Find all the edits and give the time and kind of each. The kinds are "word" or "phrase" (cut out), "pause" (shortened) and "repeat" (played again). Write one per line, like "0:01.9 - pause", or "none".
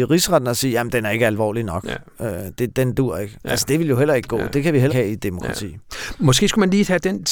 0:04.9 - word